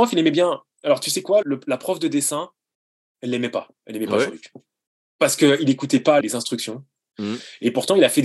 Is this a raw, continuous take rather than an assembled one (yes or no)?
no